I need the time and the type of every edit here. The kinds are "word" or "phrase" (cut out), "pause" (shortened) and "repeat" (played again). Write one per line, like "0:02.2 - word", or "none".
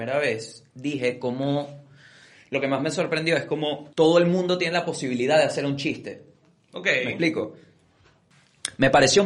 0:03.9 - pause

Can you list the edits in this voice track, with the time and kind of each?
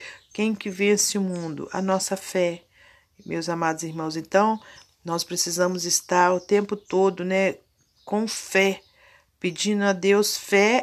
none

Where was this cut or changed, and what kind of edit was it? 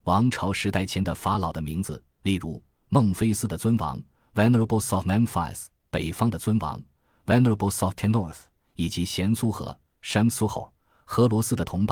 none

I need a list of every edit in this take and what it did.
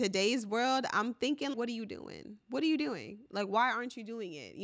0:01.5 - word
0:02.4 - pause

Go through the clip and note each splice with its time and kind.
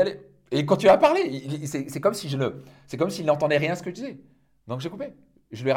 none

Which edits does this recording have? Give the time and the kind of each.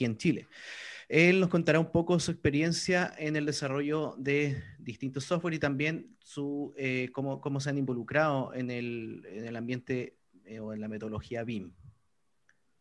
none

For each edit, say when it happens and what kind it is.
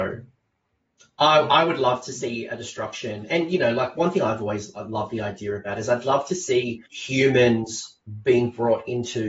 0:06.9 - pause

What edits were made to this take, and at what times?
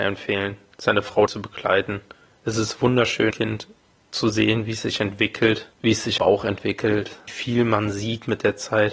0:01.3 - word
0:03.3 - word
0:06.2 - word
0:07.3 - word

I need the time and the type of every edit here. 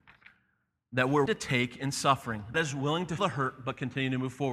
0:01.3 - word
0:02.5 - word
0:03.2 - word

